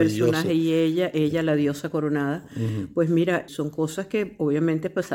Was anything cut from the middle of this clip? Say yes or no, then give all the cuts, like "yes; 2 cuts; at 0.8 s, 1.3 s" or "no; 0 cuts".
yes; 1 cut; at 3.5 s